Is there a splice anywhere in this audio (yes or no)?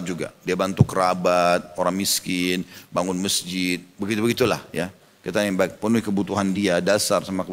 no